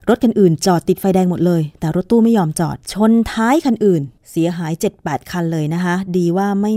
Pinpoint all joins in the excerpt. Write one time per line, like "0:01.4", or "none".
0:02.8
0:04.2